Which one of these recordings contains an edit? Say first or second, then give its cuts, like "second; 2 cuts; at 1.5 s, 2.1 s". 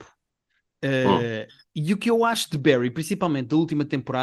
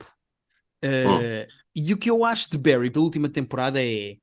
second; 1 cut; at 2.9 s